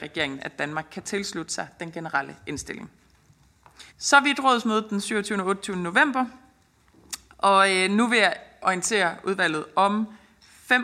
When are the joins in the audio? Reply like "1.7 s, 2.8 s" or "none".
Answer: 3.9 s